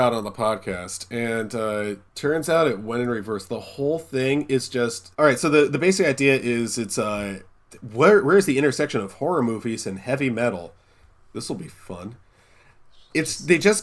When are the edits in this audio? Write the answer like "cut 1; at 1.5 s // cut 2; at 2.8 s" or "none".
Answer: cut 1; at 2.1 s // cut 2; at 5.1 s